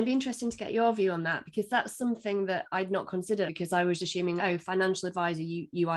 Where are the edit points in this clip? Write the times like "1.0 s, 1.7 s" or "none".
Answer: 3.5 s, 4.0 s, 4.4 s